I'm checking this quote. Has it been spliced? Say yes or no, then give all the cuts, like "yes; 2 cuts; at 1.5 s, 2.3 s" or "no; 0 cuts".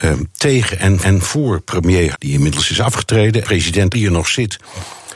yes; 4 cuts; at 1.0 s, 2.1 s, 3.4 s, 3.9 s